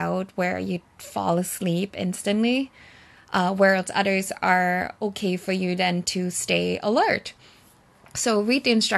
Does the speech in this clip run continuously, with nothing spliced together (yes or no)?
yes